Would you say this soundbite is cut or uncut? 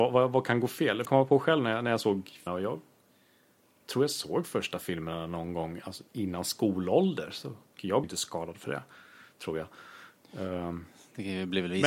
cut